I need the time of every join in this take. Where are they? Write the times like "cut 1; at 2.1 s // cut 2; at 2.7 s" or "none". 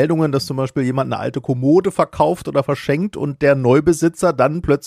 none